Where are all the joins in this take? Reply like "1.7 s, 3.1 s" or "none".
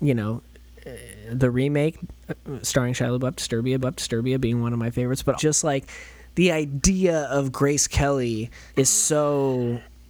3.8 s, 5.4 s, 8.7 s